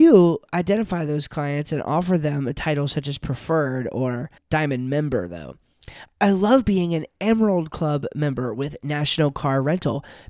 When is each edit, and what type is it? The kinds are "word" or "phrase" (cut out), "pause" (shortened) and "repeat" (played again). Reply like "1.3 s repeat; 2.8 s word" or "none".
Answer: 4.4 s pause